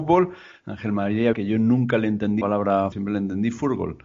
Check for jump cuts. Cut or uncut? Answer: cut